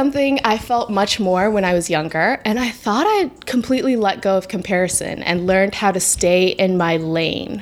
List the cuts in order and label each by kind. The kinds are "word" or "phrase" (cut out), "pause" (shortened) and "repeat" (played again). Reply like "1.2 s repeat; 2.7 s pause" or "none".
none